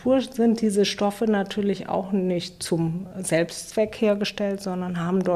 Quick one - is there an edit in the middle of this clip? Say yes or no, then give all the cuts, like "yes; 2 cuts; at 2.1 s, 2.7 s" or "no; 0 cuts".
no; 0 cuts